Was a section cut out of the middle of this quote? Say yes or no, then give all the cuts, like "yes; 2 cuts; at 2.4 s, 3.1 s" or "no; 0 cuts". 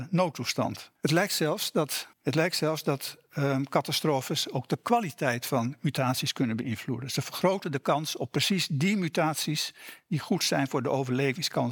yes; 2 cuts; at 1.0 s, 2.1 s